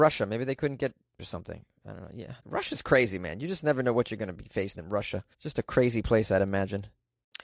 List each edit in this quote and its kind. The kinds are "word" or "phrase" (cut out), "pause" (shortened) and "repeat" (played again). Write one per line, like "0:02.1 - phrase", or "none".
0:01.2 - phrase
0:02.4 - pause
0:04.7 - word
0:05.3 - pause